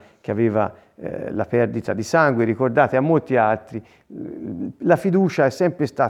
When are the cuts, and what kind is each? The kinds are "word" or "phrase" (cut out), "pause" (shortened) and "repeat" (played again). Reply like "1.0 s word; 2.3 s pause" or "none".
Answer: none